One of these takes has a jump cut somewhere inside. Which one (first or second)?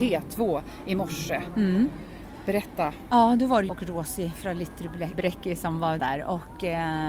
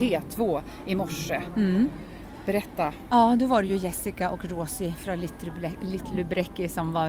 first